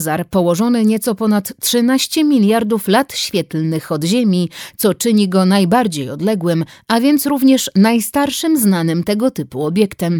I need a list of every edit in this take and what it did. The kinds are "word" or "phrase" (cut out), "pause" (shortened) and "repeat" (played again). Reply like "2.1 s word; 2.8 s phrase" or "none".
none